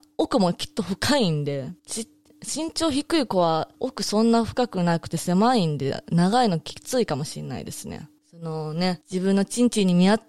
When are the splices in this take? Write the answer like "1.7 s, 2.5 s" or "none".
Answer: 1.8 s, 3.7 s, 8.2 s, 9.0 s